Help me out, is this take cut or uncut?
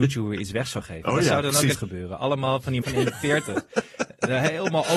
cut